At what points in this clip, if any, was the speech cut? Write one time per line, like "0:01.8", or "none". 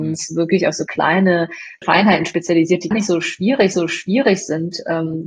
0:01.8
0:02.9
0:03.7